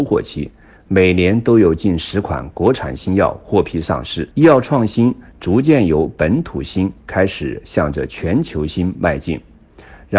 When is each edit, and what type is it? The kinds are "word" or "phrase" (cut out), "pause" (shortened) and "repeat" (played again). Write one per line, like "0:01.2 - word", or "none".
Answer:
0:04.3 - pause